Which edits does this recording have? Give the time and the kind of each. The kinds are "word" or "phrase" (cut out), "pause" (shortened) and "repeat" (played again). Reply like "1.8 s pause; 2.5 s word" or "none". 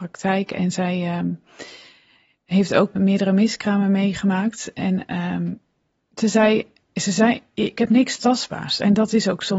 3.0 s word